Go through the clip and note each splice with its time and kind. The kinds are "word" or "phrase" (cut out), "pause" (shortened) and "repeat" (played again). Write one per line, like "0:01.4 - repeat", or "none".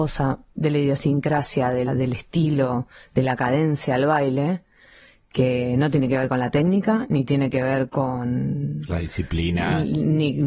0:01.9 - word
0:07.9 - word